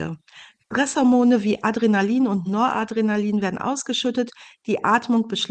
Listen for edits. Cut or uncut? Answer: uncut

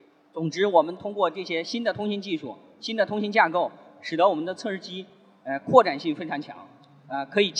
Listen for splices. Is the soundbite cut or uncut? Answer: uncut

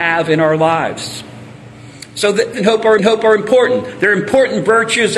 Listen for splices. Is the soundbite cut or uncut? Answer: cut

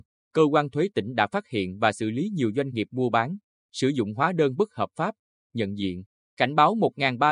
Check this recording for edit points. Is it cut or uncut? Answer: uncut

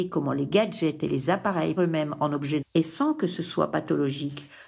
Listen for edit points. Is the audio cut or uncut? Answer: cut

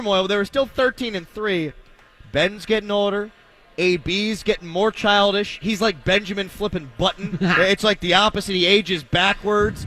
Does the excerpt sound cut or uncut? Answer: uncut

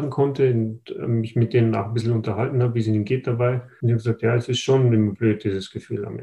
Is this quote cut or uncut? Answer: uncut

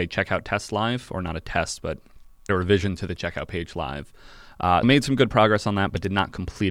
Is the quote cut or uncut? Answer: cut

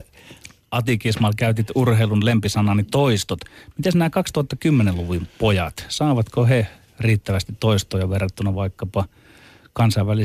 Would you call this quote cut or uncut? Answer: uncut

